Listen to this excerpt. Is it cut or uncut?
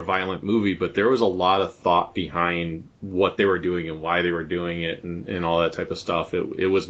cut